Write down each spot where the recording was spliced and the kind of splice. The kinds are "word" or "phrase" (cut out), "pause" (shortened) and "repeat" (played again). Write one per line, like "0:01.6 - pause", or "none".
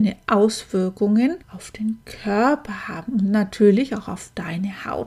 0:01.4 - pause